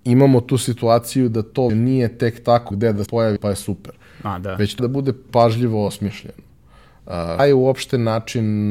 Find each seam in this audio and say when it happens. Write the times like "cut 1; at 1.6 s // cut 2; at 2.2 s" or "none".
cut 1; at 1.7 s // cut 2; at 2.7 s // cut 3; at 3.1 s // cut 4; at 3.4 s // cut 5; at 4.8 s // cut 6; at 5.3 s // cut 7; at 7.4 s